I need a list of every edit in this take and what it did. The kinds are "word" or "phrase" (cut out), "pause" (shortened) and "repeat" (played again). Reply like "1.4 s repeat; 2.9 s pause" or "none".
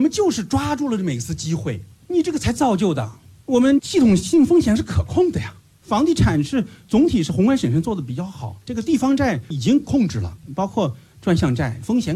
8.6 s pause